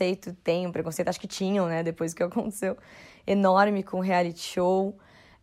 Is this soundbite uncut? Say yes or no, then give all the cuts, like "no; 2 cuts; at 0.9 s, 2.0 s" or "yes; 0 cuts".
yes; 0 cuts